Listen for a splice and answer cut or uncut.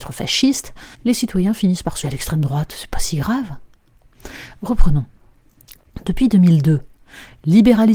cut